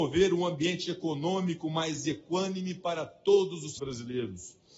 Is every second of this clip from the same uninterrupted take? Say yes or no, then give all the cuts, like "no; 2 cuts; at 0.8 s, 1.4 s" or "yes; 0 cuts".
no; 1 cut; at 3.8 s